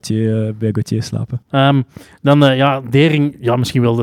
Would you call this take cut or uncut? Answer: uncut